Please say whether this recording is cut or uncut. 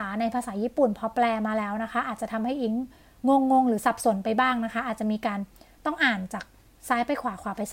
uncut